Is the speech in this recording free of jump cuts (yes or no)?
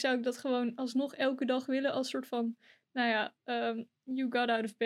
yes